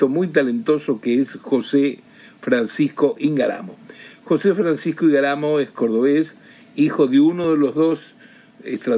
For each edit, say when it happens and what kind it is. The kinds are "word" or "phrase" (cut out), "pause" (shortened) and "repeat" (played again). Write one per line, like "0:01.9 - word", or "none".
none